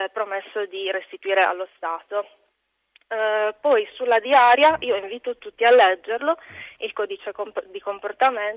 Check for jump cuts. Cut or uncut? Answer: uncut